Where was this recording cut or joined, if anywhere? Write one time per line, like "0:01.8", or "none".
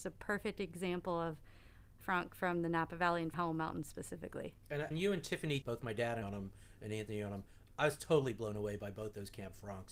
0:02.0
0:03.3
0:04.9
0:05.6
0:06.2